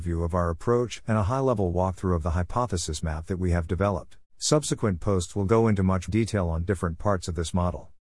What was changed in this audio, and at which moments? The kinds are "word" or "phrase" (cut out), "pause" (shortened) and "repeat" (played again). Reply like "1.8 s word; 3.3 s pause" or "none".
4.2 s pause; 6.1 s word